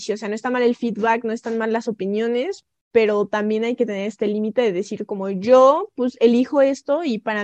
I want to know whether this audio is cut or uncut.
uncut